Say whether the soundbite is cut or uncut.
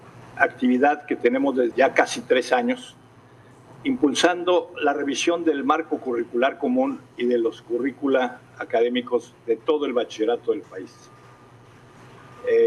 cut